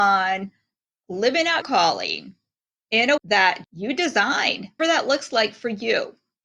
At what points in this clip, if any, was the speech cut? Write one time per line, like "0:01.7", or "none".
0:01.6
0:03.2
0:03.6
0:04.8